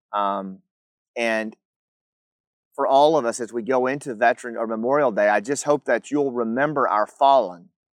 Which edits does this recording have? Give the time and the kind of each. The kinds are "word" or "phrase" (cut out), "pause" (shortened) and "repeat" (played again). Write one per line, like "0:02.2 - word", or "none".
none